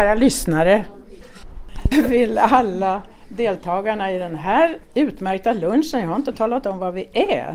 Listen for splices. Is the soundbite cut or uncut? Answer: cut